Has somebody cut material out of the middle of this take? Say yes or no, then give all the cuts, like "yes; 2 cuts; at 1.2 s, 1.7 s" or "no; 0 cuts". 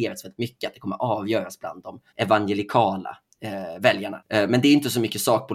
yes; 1 cut; at 2.1 s